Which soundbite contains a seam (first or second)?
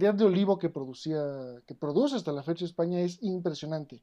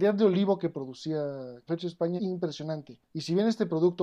second